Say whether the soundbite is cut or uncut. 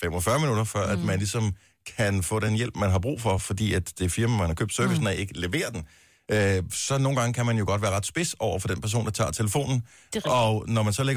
uncut